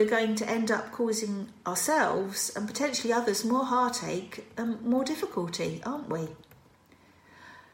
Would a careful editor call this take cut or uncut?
uncut